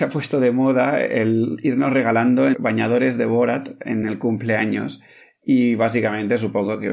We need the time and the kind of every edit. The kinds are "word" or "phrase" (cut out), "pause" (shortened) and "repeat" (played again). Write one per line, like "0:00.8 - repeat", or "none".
none